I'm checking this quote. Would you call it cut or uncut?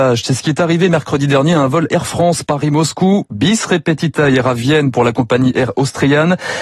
uncut